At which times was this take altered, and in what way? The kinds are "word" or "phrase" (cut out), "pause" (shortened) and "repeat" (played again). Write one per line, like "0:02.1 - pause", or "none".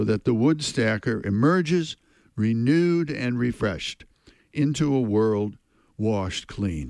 none